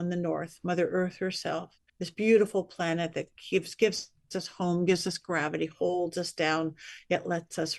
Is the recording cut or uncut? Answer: cut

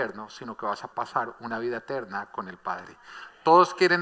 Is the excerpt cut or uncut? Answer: cut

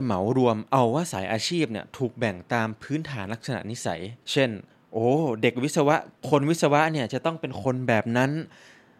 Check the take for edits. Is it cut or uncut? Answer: cut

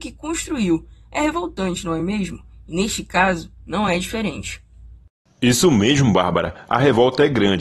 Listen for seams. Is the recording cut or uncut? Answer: uncut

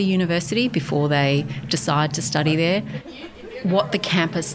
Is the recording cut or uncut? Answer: uncut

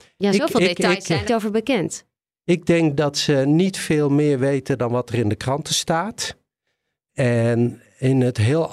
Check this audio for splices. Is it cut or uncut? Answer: cut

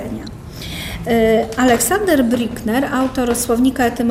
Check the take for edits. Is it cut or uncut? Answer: uncut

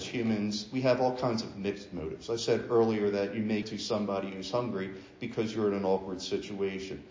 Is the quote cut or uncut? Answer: cut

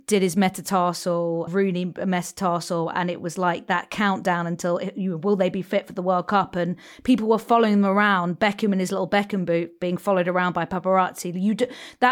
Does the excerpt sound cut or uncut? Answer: cut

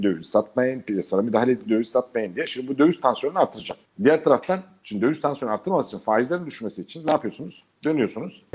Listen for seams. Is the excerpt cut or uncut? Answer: uncut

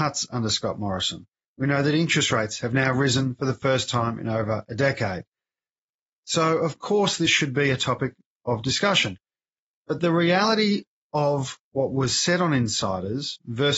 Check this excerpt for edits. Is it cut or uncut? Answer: uncut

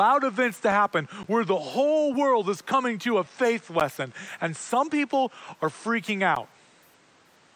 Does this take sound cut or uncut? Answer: uncut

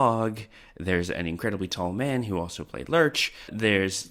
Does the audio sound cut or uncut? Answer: uncut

